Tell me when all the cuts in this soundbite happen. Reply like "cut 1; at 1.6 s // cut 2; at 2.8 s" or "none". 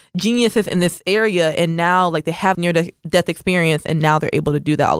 cut 1; at 2.5 s